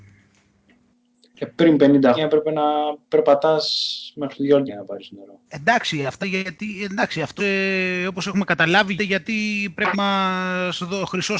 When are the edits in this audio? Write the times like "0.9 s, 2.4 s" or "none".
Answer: 2.2 s, 3.0 s, 4.7 s, 5.5 s, 6.2 s, 7.4 s, 9.0 s, 9.9 s